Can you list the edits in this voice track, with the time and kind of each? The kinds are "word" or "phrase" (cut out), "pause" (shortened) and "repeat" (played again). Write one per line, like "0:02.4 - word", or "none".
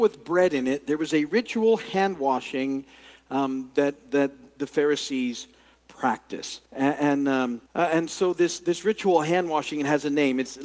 0:06.6 - pause
0:07.7 - pause